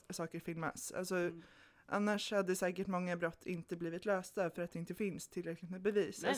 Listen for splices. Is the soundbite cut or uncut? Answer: uncut